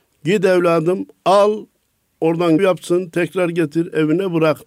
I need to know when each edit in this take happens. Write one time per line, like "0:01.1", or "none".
0:02.6

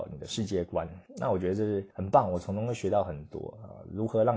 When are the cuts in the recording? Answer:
0:01.1
0:01.9

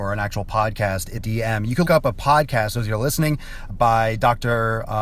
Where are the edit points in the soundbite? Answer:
0:01.2
0:01.9
0:03.7

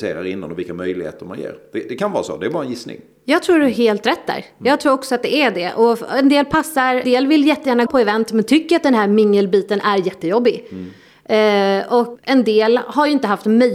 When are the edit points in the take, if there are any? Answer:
0:07.0
0:07.9
0:12.1

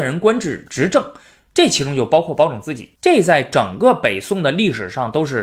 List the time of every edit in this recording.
0:03.0

